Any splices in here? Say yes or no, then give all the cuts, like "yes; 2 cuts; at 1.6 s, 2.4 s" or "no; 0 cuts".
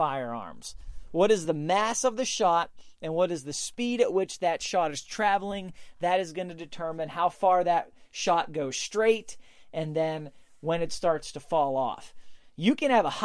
no; 0 cuts